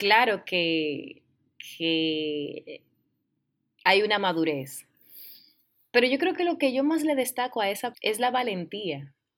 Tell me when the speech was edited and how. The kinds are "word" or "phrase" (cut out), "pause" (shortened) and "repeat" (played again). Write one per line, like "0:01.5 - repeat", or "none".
0:07.9 - word